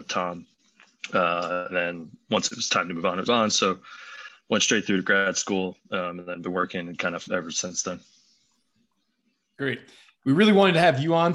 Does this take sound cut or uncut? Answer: cut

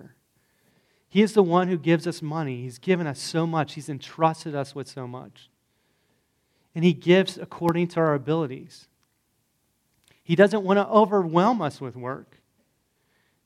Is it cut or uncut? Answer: uncut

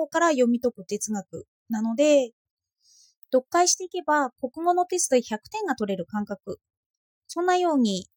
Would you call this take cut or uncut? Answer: uncut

